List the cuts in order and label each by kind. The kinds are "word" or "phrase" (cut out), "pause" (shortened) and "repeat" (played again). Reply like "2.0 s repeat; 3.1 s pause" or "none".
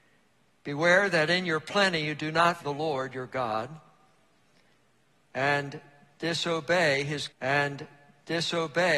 2.6 s word; 7.3 s repeat